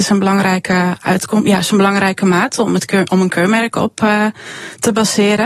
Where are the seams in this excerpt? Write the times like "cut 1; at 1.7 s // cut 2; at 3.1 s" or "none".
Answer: none